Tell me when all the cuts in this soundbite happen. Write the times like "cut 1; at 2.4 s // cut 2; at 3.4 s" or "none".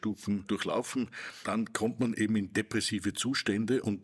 none